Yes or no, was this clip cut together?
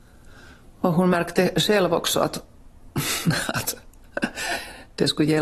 no